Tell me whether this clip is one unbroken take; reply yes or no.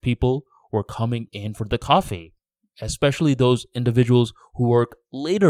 yes